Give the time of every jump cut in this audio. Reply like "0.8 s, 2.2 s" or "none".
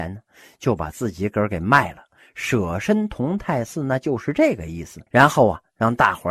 5.1 s